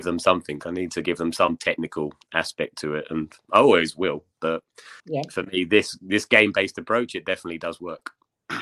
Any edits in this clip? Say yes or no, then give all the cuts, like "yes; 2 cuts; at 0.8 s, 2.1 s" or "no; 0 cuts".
yes; 1 cut; at 5.0 s